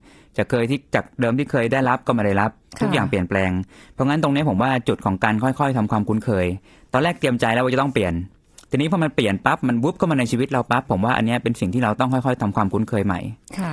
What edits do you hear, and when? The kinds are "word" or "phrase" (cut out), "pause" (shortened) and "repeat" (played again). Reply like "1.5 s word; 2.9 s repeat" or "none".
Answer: none